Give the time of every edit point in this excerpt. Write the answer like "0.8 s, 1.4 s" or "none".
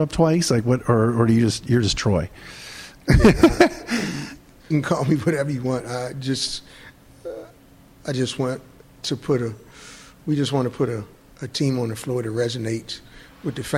4.7 s

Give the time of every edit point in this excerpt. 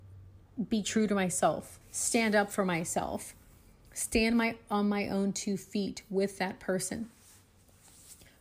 1.8 s

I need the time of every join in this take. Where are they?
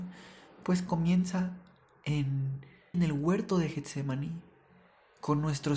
2.9 s

